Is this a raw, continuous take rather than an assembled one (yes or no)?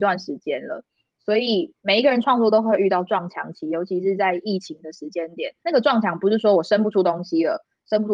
no